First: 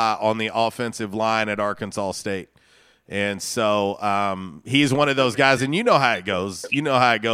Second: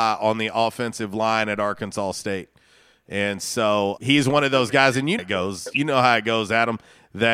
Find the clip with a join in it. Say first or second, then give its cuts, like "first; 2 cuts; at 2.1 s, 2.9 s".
second; 2 cuts; at 4.0 s, 5.2 s